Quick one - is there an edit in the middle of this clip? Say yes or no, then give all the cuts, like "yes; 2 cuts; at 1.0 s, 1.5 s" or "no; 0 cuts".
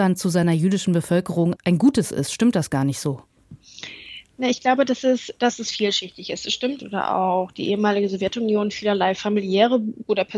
yes; 2 cuts; at 1.6 s, 6.8 s